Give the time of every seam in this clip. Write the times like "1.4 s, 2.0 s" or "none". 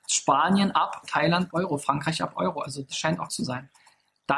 1.0 s, 1.5 s, 2.9 s, 3.3 s